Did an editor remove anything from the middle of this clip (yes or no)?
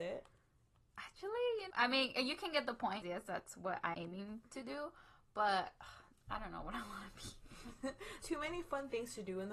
yes